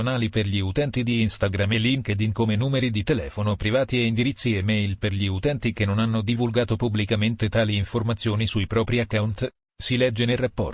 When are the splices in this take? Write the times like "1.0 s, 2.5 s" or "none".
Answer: none

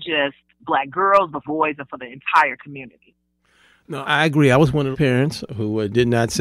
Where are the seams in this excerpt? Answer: 1.4 s, 4.0 s, 4.9 s

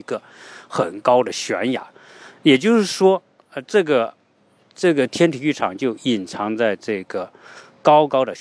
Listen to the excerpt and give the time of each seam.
none

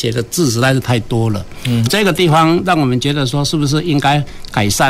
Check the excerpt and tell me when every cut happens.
1.9 s

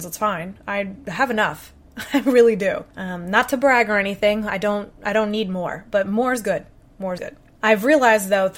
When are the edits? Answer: 7.2 s

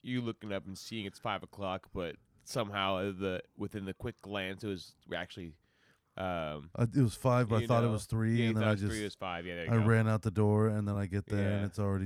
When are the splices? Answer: none

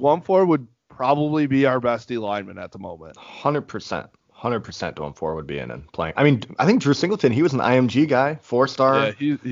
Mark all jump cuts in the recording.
none

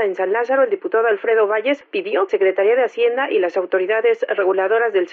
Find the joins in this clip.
2.3 s

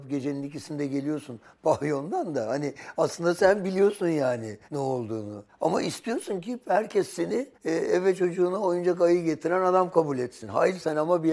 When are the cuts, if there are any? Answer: 4.6 s, 5.5 s, 7.5 s

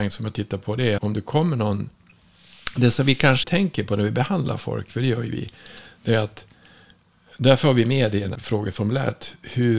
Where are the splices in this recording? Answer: 1.0 s, 3.4 s, 8.3 s

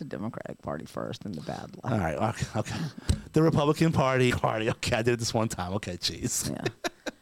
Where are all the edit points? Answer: 4.3 s

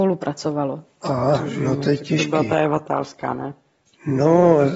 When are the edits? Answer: none

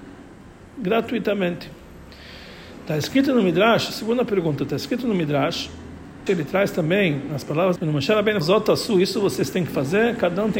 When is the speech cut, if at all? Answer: 6.3 s, 7.8 s, 8.4 s

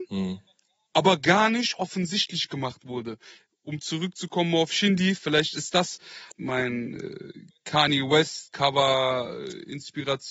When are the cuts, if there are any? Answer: none

